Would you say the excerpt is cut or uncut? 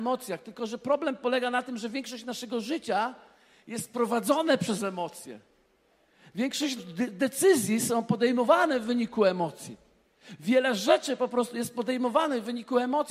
cut